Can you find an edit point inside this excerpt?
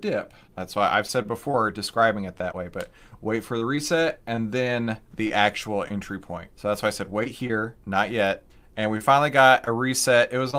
yes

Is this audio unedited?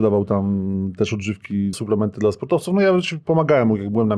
no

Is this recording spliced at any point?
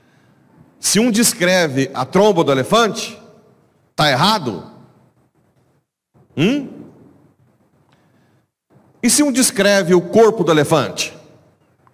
no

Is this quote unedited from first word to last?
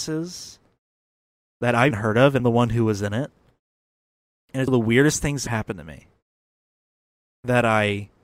no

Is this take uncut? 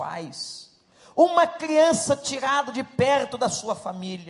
yes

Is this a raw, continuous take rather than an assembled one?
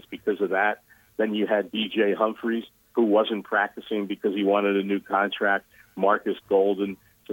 yes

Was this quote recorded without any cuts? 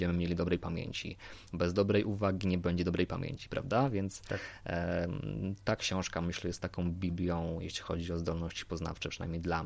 yes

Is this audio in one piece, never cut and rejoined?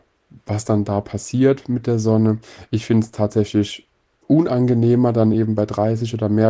yes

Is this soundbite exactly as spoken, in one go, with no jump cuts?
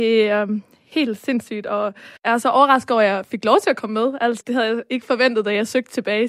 no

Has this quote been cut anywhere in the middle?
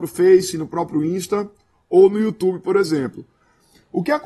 no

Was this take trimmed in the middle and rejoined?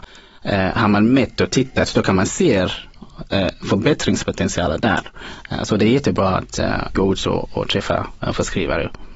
yes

